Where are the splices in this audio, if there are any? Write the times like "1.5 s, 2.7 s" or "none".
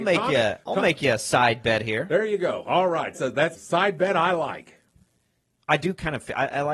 3.1 s, 3.5 s